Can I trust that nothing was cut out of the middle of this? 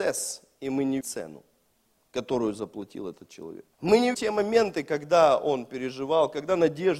no; 4 cuts; at 1.0 s, 1.7 s, 3.7 s, 4.1 s

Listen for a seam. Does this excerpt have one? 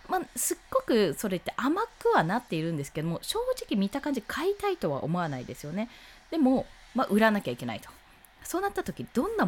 no; 0 cuts

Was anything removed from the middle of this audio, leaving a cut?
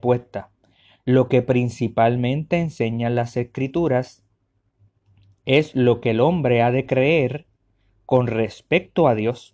no; 0 cuts

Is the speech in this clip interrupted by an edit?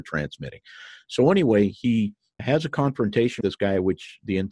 yes; 2 cuts; at 2.4 s, 3.4 s

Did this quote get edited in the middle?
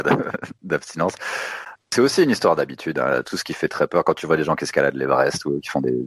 no; 0 cuts

